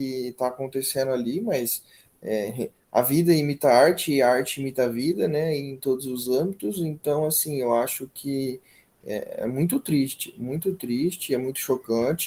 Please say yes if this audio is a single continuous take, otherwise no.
yes